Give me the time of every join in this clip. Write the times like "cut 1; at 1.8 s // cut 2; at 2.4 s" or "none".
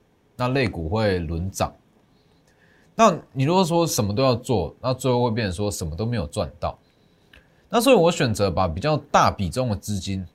none